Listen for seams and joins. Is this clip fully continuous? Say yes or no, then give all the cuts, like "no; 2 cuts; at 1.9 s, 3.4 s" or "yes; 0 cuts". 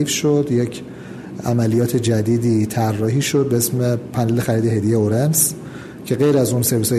yes; 0 cuts